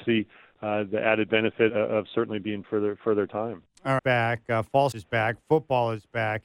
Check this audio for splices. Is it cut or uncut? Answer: cut